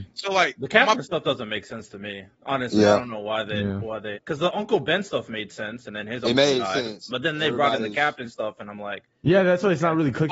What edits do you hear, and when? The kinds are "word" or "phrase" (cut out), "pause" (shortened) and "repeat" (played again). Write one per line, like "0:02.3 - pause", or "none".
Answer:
0:01.2 - word
0:04.1 - word